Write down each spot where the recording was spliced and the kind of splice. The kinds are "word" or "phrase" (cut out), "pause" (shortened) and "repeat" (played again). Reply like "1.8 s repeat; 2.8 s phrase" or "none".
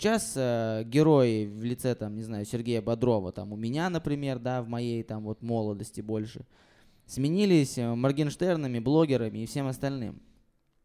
none